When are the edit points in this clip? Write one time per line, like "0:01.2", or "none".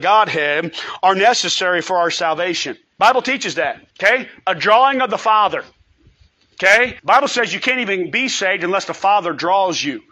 0:02.8
0:03.9
0:07.0